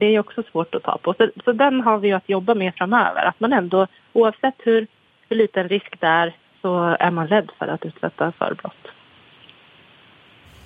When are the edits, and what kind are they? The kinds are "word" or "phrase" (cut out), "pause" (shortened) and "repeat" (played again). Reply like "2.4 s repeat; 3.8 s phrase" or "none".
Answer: none